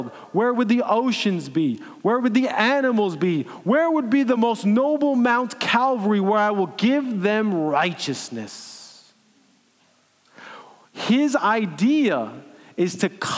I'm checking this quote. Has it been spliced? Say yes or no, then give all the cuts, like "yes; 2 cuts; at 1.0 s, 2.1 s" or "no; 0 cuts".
no; 0 cuts